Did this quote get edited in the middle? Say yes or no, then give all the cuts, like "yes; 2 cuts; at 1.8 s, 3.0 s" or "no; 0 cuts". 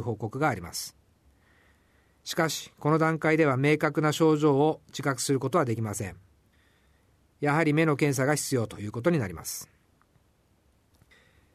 no; 0 cuts